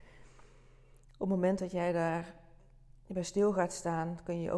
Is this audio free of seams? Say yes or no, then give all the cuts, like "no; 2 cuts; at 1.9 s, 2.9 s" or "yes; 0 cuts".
yes; 0 cuts